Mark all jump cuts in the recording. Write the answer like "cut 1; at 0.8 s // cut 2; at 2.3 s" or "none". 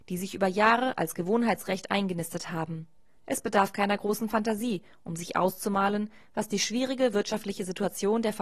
none